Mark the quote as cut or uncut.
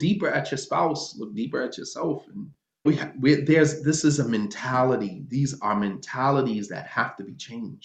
cut